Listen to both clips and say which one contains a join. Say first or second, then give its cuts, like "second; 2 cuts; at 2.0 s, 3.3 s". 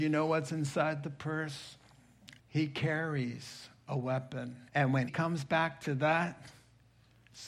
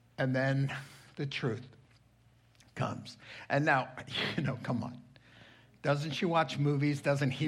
first; 3 cuts; at 2.4 s, 4.7 s, 5.1 s